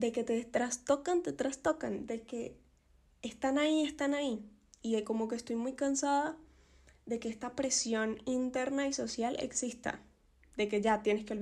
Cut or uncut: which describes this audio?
uncut